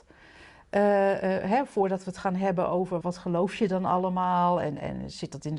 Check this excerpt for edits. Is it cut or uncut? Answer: cut